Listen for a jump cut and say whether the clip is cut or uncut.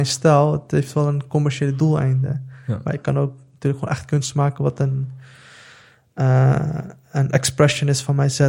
uncut